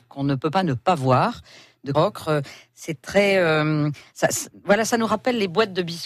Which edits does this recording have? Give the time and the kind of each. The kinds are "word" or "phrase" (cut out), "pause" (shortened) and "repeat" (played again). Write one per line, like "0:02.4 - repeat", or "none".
0:01.9 - word